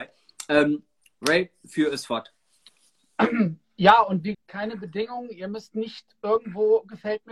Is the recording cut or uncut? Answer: cut